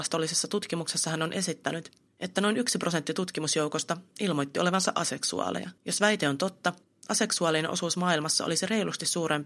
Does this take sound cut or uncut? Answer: cut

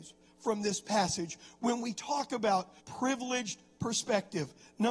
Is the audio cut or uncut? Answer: cut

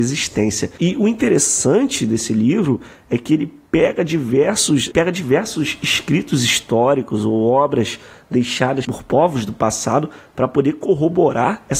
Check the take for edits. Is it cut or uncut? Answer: uncut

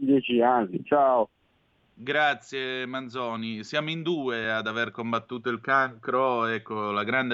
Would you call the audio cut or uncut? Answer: uncut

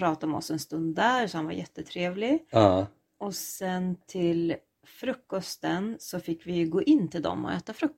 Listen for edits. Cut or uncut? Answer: uncut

